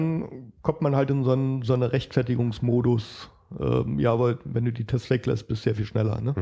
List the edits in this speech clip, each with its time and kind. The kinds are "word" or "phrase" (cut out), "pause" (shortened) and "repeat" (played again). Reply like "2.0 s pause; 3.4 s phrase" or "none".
none